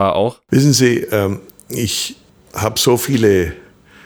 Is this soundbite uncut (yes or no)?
yes